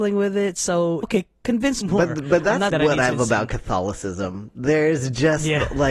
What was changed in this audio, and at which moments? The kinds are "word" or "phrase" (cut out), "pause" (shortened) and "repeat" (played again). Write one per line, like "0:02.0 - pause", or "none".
0:01.0 - word
0:01.8 - phrase
0:02.7 - word
0:03.1 - word